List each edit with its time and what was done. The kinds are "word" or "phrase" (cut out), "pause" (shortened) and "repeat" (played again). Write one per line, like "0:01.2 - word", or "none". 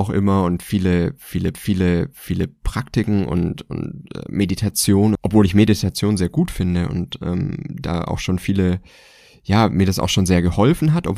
0:01.5 - repeat
0:05.1 - phrase